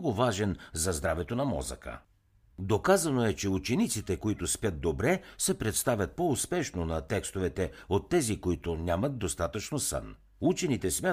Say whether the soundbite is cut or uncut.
uncut